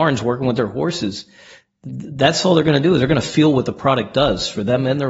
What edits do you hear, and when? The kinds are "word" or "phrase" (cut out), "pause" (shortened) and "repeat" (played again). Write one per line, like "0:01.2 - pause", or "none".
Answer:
none